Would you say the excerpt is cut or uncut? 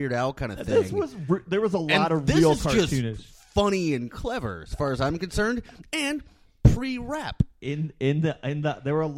uncut